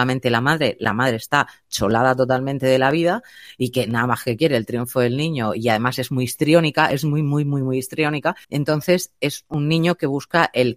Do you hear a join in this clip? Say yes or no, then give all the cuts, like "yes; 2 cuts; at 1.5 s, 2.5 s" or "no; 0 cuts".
yes; 1 cut; at 8.4 s